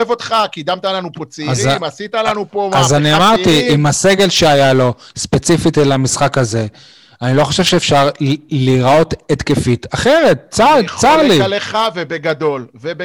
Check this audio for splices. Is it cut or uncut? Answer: uncut